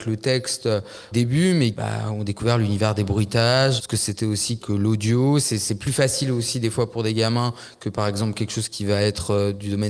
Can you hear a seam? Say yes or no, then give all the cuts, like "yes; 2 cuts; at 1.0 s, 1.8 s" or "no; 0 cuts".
yes; 4 cuts; at 1.1 s, 1.7 s, 3.8 s, 4.6 s